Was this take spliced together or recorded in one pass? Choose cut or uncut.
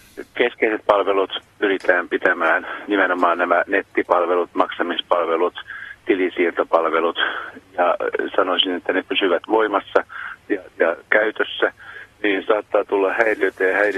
cut